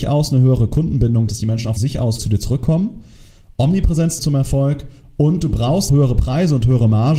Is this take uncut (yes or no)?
no